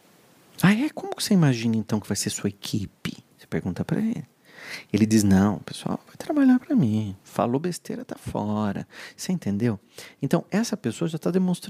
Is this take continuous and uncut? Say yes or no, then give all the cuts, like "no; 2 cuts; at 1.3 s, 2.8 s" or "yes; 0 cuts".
no; 1 cut; at 3.3 s